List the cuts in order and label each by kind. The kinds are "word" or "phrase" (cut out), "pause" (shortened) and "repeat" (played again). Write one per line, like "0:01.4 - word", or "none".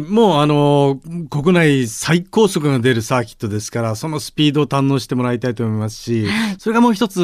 none